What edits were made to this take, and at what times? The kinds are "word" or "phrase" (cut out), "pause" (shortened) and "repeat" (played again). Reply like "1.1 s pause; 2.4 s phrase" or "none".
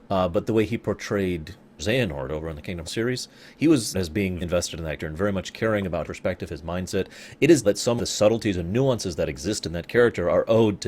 1.8 s word; 2.8 s word; 3.9 s word; 4.4 s word; 5.0 s word; 6.0 s word; 7.6 s word; 8.0 s word

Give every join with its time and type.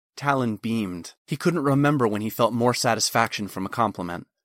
1.2 s pause

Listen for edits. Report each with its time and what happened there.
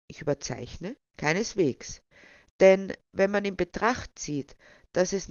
1.1 s pause

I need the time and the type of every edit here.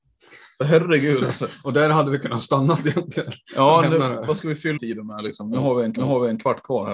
4.8 s phrase; 6.0 s repeat

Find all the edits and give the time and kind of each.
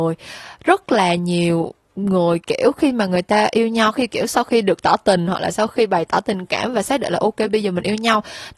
none

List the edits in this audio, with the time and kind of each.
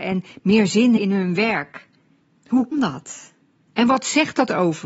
1.0 s word; 2.7 s word

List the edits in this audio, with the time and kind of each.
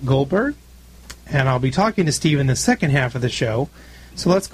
none

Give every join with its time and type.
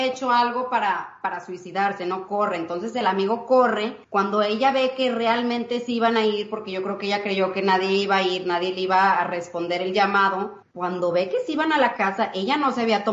4.0 s pause; 10.6 s pause

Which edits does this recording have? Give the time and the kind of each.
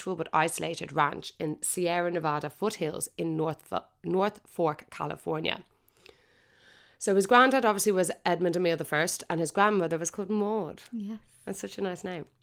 none

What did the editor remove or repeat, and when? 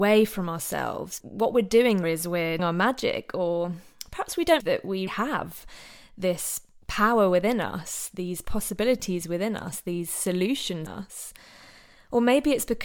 1.2 s word; 2.0 s word; 2.6 s word; 4.6 s word; 5.1 s word; 10.9 s word

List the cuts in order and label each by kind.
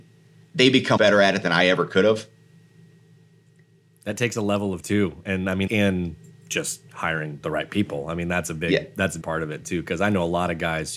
1.0 s word; 4.8 s word; 5.7 s word; 9.2 s word

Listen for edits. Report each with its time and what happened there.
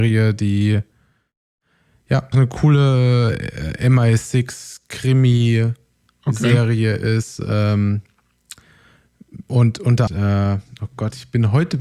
2.3 s word; 10.1 s phrase

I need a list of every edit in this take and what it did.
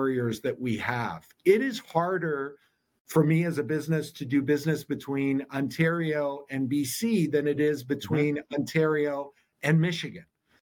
none

